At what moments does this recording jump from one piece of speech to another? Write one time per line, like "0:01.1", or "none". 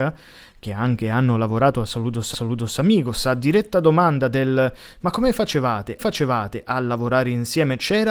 0:02.3
0:06.0